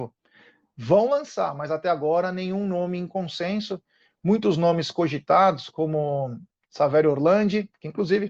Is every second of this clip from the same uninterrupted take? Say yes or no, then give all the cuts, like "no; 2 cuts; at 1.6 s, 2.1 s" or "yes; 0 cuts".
yes; 0 cuts